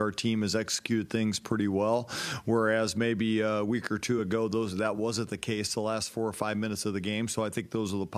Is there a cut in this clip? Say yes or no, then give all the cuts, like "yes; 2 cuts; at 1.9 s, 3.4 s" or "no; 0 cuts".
no; 0 cuts